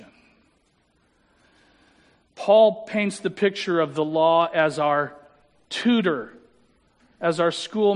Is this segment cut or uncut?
uncut